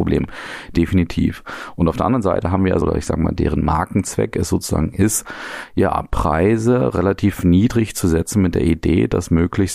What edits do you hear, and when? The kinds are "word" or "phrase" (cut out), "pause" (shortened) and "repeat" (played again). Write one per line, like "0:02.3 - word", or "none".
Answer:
0:02.8 - phrase